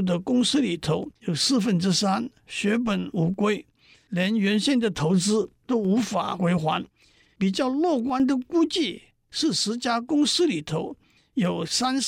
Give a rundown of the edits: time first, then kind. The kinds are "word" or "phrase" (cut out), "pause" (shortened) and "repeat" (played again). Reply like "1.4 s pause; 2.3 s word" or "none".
1.2 s pause